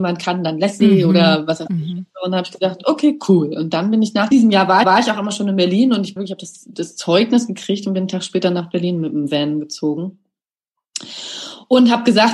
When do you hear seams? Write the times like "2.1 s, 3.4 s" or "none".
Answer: 4.3 s, 4.8 s, 6.2 s